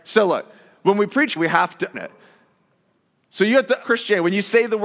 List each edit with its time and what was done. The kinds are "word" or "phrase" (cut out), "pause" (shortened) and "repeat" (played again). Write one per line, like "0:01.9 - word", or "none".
0:01.4 - word
0:01.9 - word
0:03.8 - word

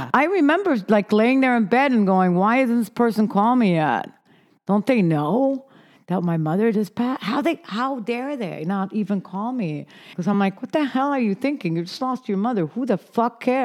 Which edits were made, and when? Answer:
none

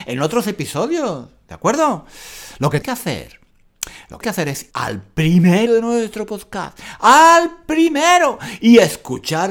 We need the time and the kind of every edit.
0:02.8 - word
0:04.2 - word
0:04.7 - word
0:05.7 - word

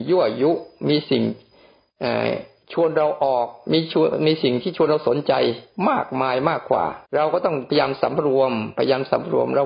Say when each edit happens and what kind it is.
0:07.0 - pause

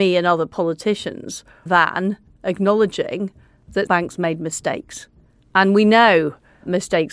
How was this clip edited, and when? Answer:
0:01.7 - word
0:03.9 - word

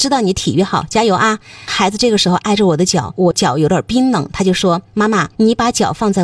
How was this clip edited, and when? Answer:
0:05.3 - pause

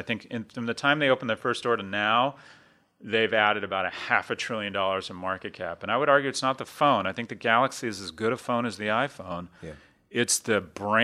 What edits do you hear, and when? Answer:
none

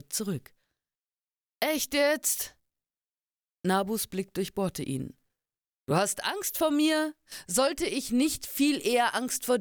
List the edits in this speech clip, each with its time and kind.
none

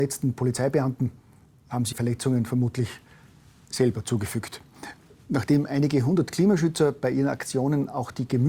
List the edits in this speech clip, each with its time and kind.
0:01.9 - word

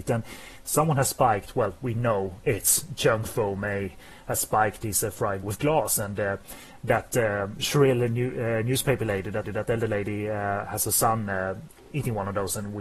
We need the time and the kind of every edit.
0:04.8 - word
0:05.4 - word
0:09.4 - repeat

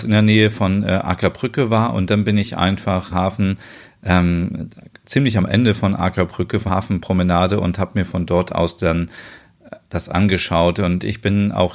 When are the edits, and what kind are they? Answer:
0:03.1 - phrase
0:06.7 - word
0:10.1 - word

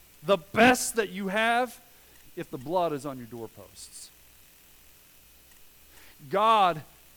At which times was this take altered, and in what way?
none

